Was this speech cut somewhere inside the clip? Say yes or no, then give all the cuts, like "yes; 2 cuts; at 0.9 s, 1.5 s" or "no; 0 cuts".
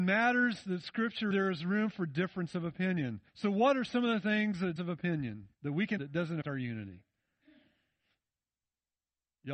yes; 6 cuts; at 1.3 s, 3.3 s, 4.8 s, 5.5 s, 6.0 s, 6.4 s